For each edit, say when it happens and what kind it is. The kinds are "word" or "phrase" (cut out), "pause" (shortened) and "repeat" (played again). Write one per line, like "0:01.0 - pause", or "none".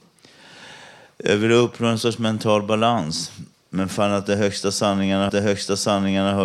0:03.5 - pause
0:05.3 - repeat